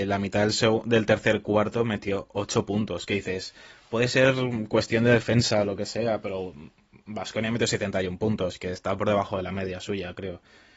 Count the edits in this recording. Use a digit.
0